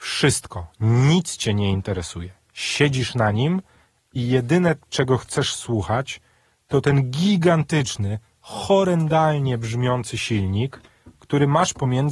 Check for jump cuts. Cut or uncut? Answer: uncut